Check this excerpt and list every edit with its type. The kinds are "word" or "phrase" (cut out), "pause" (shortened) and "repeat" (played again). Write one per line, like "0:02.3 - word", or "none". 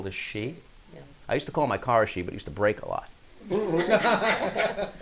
none